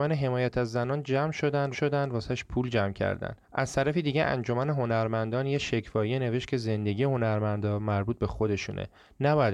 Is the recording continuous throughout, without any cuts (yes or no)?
no